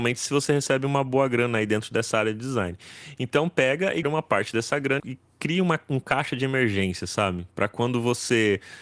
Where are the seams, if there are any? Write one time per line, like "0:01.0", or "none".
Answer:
0:04.0
0:05.0